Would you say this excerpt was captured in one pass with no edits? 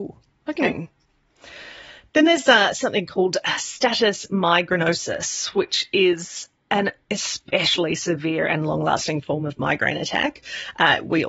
yes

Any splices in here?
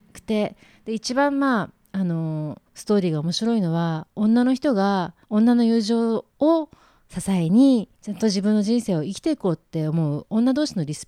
yes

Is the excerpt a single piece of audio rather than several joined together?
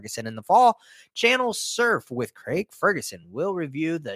yes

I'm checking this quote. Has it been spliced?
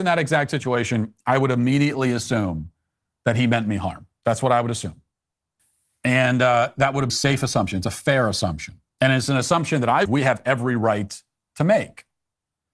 yes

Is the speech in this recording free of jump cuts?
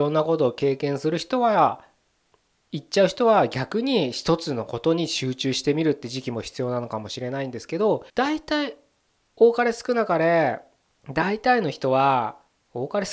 no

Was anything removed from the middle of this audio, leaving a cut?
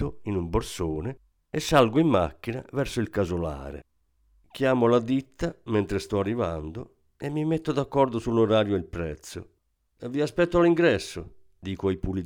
no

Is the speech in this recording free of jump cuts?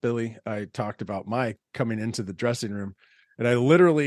yes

